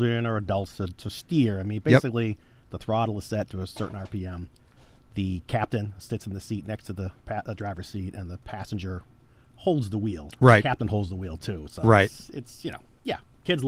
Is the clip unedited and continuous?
yes; 0 cuts

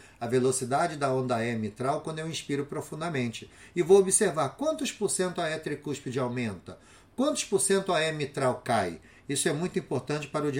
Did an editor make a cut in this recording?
no; 0 cuts

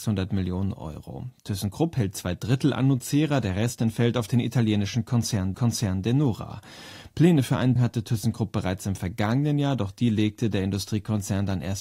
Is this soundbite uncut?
no; 2 cuts; at 5.5 s, 7.8 s

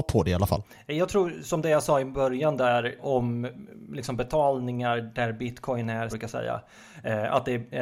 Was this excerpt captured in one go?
no; 2 cuts; at 3.0 s, 6.1 s

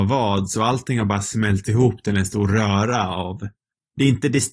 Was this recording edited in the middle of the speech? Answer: no; 0 cuts

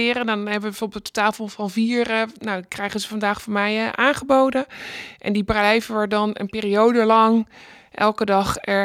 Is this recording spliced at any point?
no; 0 cuts

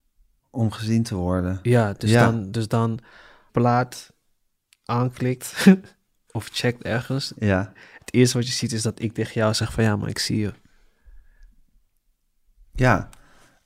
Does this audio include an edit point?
yes; 1 cut; at 3.5 s

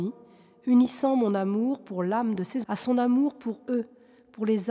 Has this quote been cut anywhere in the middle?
yes; 1 cut; at 2.6 s

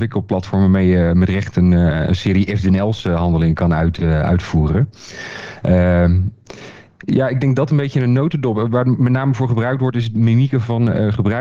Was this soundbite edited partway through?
no; 0 cuts

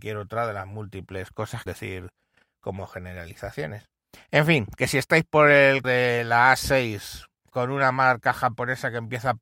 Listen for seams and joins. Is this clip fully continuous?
no; 3 cuts; at 1.7 s, 5.8 s, 7.5 s

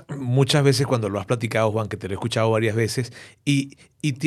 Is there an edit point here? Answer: no; 0 cuts

